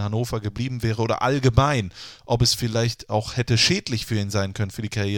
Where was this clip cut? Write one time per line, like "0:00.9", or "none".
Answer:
none